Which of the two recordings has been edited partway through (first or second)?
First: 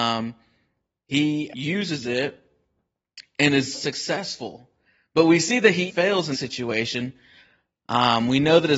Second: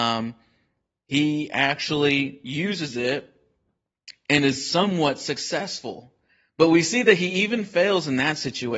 first